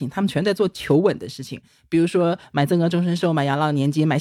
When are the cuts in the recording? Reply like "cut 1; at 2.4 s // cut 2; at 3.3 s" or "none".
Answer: none